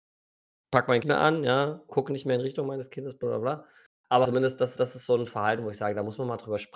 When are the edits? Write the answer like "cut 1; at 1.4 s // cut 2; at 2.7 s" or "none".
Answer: cut 1; at 1.0 s // cut 2; at 1.9 s // cut 3; at 3.2 s // cut 4; at 4.2 s // cut 5; at 4.8 s